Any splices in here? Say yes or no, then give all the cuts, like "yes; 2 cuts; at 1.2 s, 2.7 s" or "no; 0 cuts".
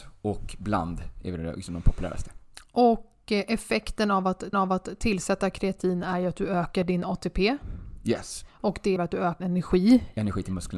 yes; 5 cuts; at 1.2 s, 4.5 s, 8.5 s, 9.0 s, 9.4 s